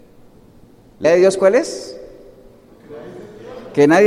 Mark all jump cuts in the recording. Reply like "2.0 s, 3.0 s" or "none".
1.0 s